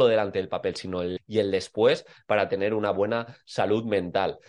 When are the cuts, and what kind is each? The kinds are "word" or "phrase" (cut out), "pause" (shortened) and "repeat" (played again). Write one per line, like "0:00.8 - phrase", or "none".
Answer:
0:01.2 - word